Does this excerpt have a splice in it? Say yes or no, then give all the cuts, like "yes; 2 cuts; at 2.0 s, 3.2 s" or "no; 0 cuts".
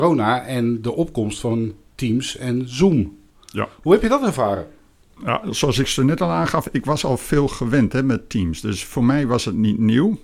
no; 0 cuts